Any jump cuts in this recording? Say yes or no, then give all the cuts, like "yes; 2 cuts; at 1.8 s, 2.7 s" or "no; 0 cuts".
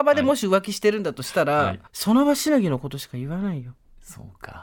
yes; 1 cut; at 1.9 s